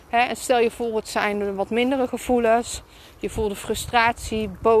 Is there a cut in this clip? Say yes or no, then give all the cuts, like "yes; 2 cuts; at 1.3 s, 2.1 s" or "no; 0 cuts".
no; 0 cuts